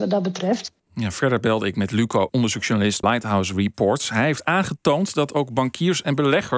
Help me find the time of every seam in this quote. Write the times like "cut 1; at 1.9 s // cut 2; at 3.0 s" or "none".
cut 1; at 2.3 s // cut 2; at 3.0 s